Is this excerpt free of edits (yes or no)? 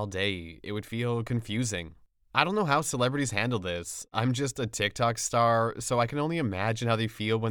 yes